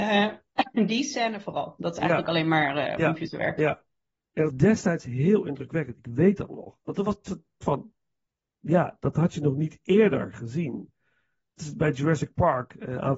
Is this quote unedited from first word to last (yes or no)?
no